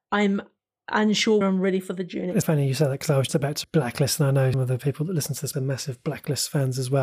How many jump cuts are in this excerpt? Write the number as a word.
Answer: six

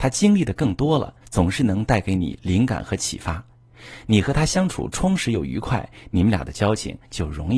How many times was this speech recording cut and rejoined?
one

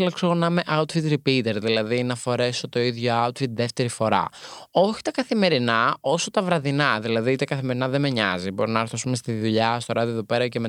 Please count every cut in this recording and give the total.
zero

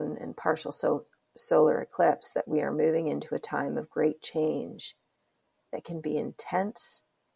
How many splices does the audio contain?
zero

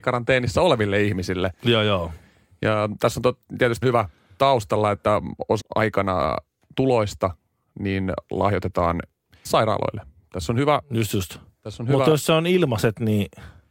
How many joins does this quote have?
four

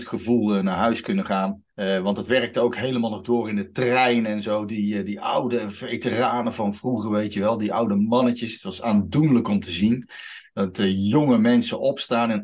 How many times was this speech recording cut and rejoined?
one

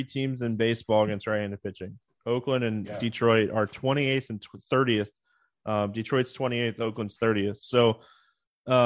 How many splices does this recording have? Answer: zero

